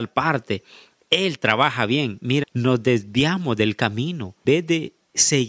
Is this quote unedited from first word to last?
no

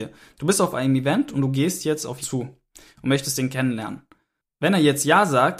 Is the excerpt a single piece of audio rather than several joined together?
no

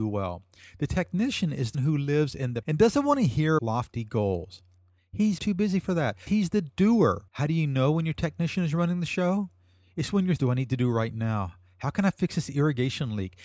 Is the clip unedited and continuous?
no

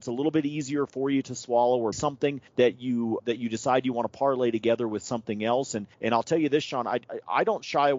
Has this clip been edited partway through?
yes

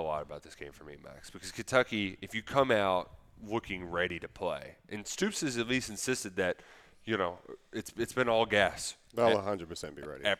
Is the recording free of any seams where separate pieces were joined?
yes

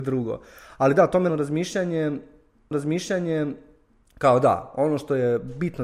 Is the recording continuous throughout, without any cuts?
no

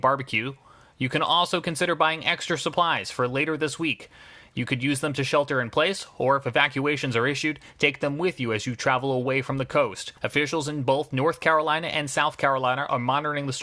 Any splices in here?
yes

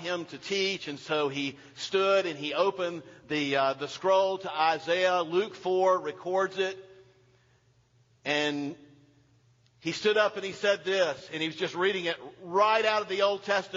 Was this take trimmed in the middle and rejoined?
no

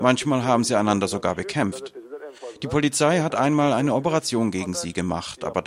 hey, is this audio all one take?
yes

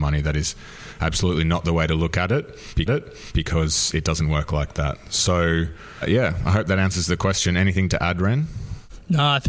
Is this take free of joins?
no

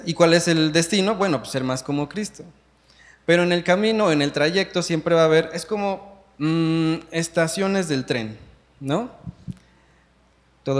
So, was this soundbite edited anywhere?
no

